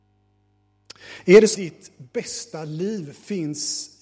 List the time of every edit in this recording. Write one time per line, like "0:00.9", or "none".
0:01.5

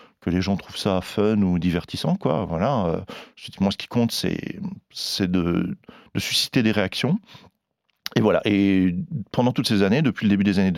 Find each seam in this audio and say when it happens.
none

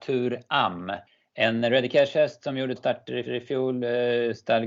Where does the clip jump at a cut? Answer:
0:01.1
0:02.8
0:03.3

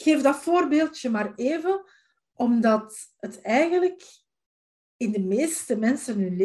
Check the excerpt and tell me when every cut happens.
none

